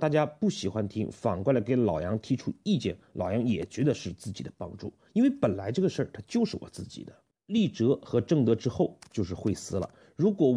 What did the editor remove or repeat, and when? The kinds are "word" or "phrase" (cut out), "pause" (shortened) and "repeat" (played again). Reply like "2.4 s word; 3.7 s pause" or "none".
7.3 s pause